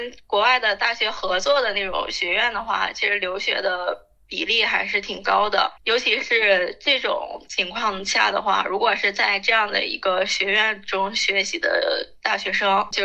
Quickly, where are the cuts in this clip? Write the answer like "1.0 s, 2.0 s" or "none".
5.8 s